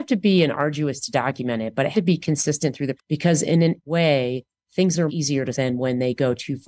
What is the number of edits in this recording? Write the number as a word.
six